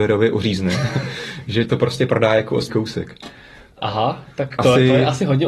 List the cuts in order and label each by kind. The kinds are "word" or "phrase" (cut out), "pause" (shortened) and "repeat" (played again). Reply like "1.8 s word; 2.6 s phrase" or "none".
1.7 s word; 2.7 s word; 4.6 s word

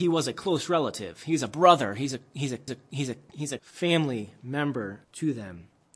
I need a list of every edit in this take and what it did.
2.7 s repeat; 3.6 s word; 5.0 s pause

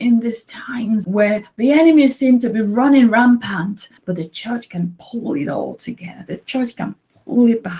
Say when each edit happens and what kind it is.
1.0 s word; 4.0 s pause

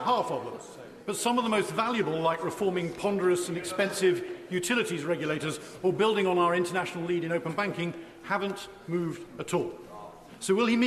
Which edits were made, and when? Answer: none

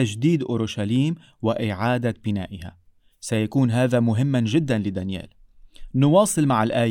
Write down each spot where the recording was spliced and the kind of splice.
none

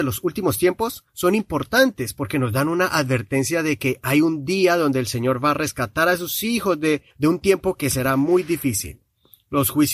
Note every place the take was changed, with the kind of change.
1.1 s pause; 7.1 s pause

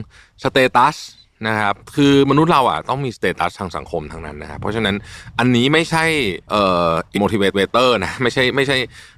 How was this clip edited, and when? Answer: 6.4 s pause; 7.1 s word; 7.5 s repeat

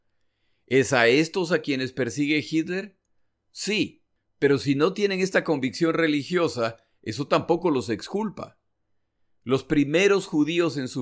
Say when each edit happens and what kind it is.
none

